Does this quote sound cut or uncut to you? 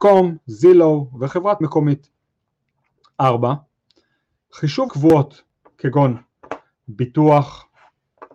cut